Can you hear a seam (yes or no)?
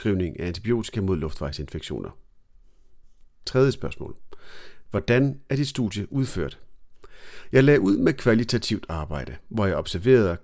no